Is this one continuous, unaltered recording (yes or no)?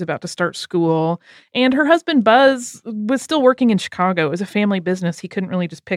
yes